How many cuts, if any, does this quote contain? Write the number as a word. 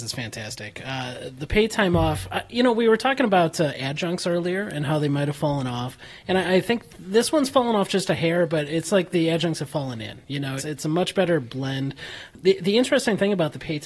one